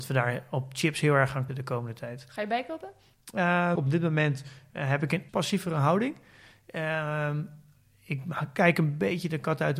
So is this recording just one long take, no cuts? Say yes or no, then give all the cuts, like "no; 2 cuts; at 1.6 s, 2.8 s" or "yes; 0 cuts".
no; 3 cuts; at 1.5 s, 3.7 s, 5.3 s